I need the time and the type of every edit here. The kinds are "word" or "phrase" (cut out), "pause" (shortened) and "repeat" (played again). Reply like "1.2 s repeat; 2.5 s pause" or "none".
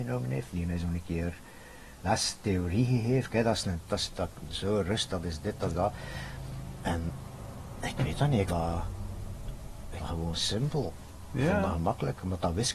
2.0 s word; 3.9 s word; 5.7 s word; 8.5 s word; 10.0 s word; 11.7 s word